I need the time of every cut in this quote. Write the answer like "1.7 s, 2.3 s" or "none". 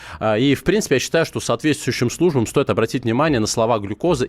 none